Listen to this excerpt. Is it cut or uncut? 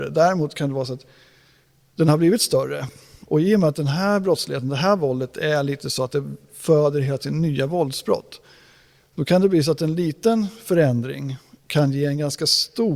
uncut